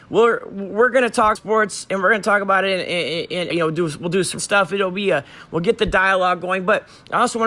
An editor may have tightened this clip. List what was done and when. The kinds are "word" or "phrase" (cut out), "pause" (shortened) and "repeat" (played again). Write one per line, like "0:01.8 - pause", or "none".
0:01.4 - word
0:03.5 - word
0:04.4 - word